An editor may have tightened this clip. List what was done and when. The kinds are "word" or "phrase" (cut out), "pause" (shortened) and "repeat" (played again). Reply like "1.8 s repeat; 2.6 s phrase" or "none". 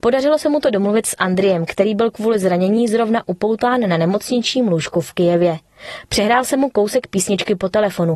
none